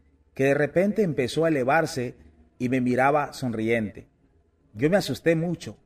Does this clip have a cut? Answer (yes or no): no